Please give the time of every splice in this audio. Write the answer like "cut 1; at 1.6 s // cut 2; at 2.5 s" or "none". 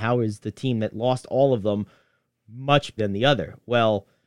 cut 1; at 3.0 s